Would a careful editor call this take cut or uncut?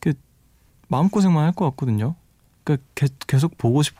uncut